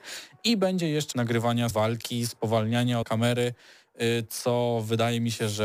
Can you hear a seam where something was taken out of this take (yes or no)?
yes